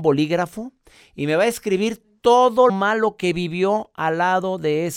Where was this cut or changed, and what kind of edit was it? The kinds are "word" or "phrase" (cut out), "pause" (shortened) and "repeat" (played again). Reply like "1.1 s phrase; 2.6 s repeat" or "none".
2.7 s word